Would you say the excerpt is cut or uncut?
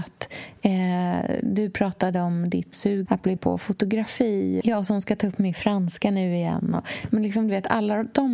cut